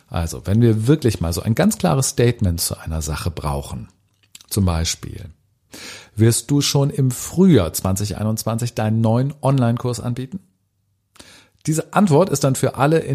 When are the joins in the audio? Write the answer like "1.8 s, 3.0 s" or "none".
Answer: none